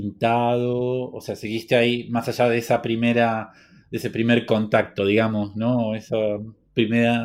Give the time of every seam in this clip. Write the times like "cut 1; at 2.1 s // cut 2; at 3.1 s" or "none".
none